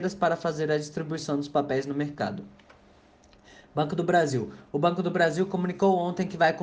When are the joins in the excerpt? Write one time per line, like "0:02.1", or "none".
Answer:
none